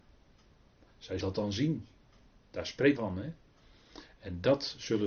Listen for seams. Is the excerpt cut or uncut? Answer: cut